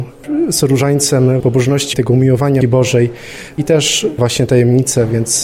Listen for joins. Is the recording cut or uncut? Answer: cut